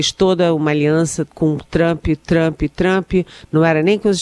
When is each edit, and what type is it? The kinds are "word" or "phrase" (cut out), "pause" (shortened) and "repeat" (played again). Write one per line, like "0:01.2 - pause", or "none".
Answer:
0:01.3 - pause

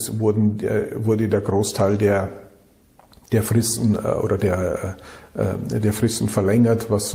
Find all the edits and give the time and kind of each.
none

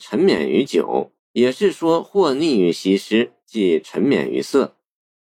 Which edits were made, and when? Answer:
0:01.2 - pause
0:03.4 - pause

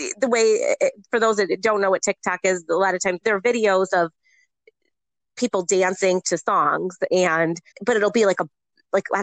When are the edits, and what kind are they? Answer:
0:03.2 - word
0:07.7 - word

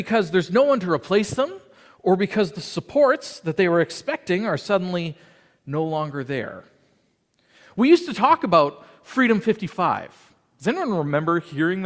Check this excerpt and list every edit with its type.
none

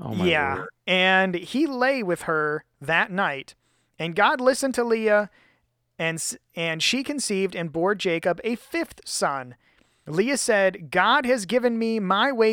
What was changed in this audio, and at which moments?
none

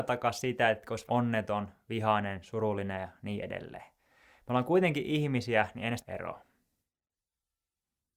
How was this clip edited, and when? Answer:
0:01.1 - word
0:06.0 - phrase

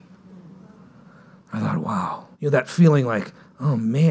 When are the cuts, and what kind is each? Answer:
0:02.3 - pause

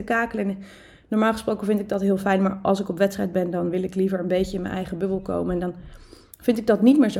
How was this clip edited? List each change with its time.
none

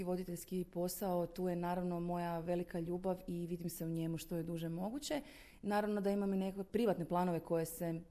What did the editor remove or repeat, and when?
none

